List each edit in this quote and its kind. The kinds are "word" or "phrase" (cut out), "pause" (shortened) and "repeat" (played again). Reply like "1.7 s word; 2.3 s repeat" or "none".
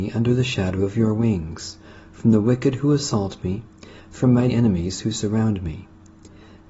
4.5 s word